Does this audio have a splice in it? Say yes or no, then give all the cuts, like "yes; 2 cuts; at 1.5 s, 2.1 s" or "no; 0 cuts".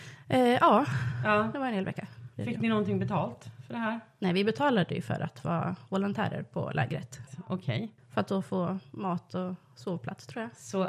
no; 0 cuts